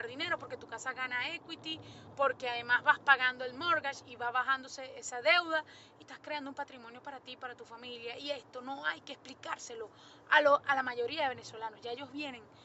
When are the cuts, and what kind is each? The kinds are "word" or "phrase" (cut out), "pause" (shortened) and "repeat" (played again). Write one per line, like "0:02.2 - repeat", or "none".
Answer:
0:06.0 - word